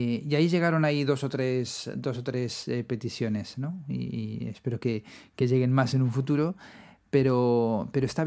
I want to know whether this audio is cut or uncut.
uncut